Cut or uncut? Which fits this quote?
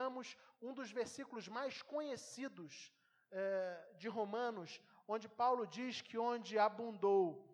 uncut